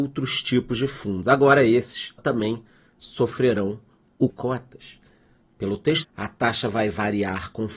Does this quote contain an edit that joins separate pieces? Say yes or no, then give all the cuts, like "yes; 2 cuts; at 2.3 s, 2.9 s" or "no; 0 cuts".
yes; 3 cuts; at 2.2 s, 4.3 s, 6.0 s